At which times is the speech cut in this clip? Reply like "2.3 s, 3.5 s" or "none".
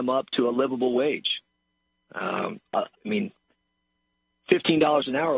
2.9 s